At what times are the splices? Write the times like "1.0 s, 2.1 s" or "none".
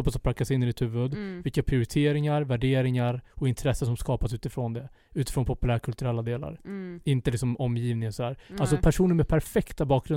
none

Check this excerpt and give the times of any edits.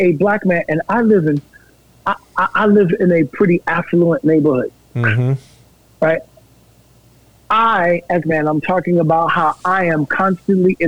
8.2 s

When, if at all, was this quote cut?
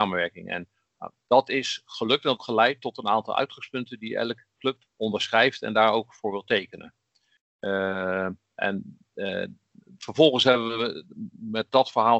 2.4 s, 4.9 s

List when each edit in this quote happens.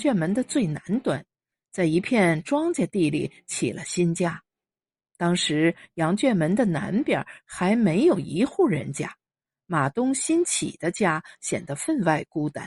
none

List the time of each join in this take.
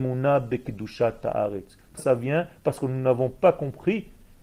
2.0 s

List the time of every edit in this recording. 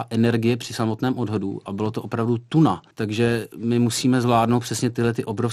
2.9 s

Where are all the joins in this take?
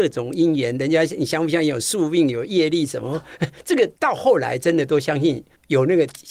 4.0 s

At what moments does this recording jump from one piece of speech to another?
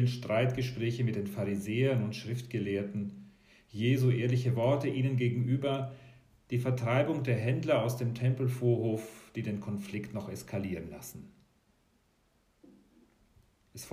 none

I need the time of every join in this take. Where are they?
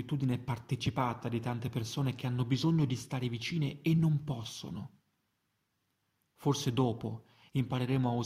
none

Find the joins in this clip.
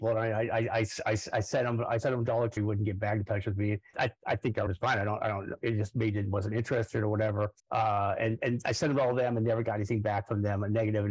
2.6 s, 3.9 s, 4.7 s, 7.6 s

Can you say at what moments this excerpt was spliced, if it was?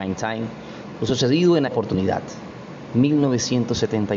1.7 s, 2.9 s

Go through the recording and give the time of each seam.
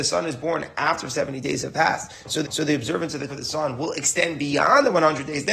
2.4 s, 3.3 s

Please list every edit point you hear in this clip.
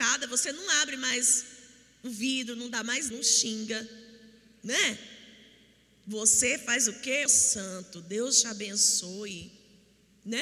3.1 s, 7.3 s

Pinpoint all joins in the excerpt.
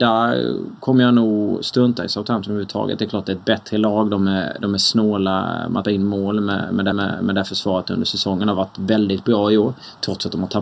5.8 s, 6.9 s

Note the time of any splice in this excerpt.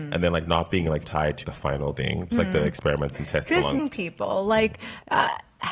1.0 s, 1.4 s, 2.3 s, 3.8 s

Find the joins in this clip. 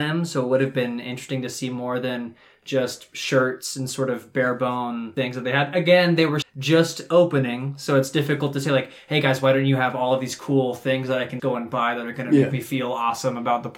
6.4 s, 11.4 s

